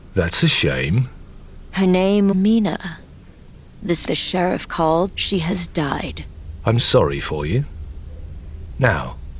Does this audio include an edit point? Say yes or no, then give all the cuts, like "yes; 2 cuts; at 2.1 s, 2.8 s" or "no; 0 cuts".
yes; 4 cuts; at 2.3 s, 4.1 s, 5.1 s, 6.8 s